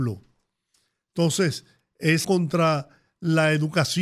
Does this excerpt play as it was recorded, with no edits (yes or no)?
no